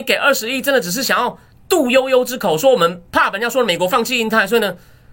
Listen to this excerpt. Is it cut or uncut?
cut